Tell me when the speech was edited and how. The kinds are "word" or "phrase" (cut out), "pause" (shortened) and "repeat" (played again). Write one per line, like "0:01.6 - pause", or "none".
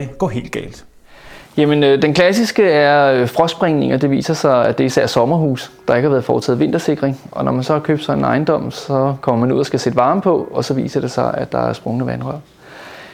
none

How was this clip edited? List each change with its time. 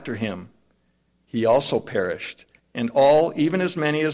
none

